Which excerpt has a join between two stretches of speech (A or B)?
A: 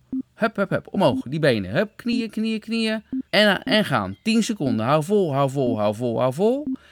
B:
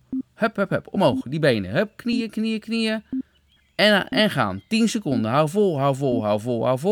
A